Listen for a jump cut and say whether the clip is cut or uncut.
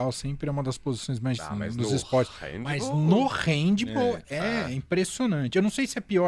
cut